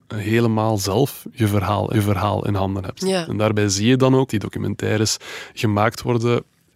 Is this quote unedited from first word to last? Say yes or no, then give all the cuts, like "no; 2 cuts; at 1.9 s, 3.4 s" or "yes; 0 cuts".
no; 2 cuts; at 1.9 s, 4.3 s